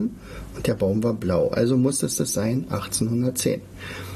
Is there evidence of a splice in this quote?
yes; 1 cut; at 2.2 s

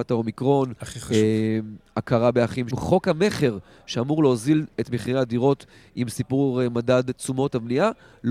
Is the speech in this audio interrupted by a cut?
yes; 1 cut; at 2.7 s

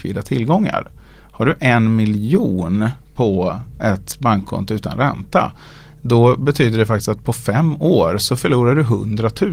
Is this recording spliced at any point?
no; 0 cuts

